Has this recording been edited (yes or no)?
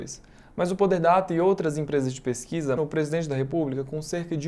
yes